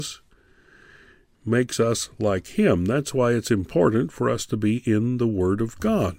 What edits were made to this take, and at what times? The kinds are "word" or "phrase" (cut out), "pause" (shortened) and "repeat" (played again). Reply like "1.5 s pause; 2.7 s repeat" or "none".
none